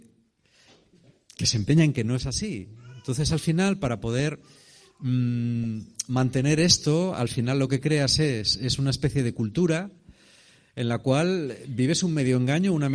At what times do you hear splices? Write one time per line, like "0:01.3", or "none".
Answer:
none